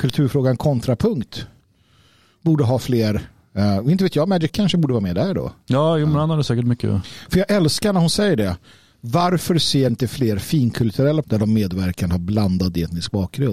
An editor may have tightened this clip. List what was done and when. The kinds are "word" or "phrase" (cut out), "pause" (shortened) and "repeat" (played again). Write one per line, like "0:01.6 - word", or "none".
0:04.5 - word
0:09.9 - word
0:11.2 - word